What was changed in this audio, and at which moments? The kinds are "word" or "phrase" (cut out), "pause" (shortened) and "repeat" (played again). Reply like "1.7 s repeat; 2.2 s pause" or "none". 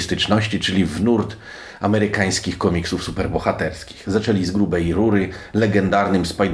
none